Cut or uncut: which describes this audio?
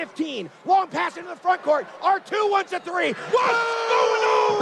uncut